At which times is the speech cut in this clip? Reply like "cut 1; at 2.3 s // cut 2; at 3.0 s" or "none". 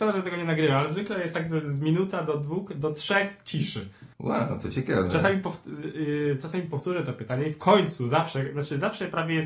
cut 1; at 4.1 s